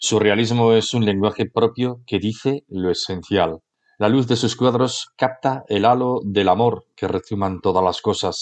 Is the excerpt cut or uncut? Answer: cut